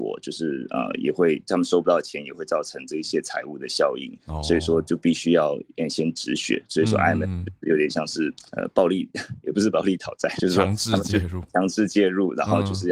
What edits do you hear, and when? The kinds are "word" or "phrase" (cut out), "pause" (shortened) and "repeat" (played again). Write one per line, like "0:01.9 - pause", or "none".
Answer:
0:04.2 - pause
0:08.5 - pause
0:10.4 - word